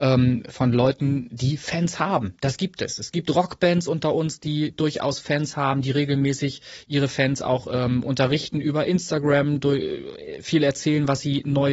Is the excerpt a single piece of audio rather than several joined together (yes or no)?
yes